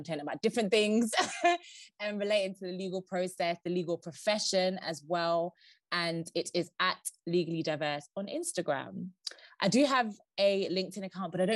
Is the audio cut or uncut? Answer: uncut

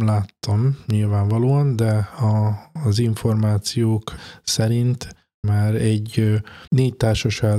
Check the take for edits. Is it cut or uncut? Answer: cut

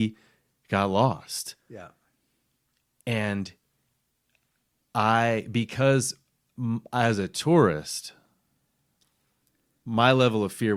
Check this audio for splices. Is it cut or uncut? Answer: uncut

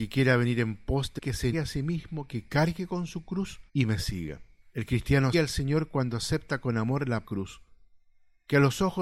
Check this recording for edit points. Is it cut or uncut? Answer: cut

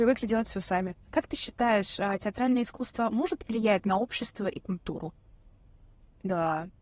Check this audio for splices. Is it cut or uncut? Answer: cut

